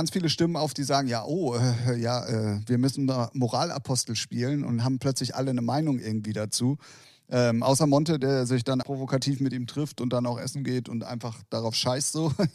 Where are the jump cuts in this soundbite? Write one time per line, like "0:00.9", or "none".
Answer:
0:08.8